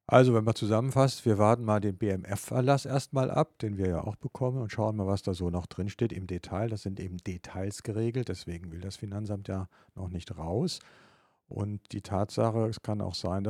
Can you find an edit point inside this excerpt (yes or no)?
no